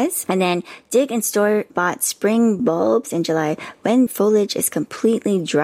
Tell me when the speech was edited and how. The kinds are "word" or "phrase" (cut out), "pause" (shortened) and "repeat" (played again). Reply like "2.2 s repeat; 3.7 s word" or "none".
2.6 s word; 3.1 s phrase; 4.1 s word